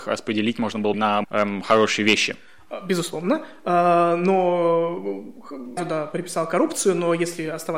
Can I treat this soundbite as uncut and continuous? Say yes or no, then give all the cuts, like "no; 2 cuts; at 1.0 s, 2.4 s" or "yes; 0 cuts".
no; 3 cuts; at 0.9 s, 1.2 s, 5.8 s